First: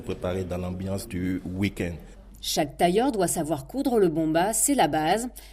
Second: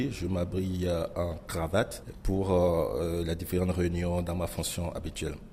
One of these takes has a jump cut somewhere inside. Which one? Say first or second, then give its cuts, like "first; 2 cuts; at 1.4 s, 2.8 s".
second; 1 cut; at 1.5 s